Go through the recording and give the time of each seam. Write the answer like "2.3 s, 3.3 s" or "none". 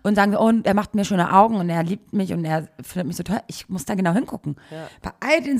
none